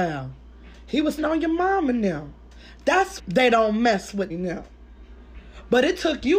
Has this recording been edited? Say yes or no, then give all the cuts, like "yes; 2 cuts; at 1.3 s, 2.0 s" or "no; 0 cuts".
yes; 3 cuts; at 1.2 s, 3.2 s, 4.3 s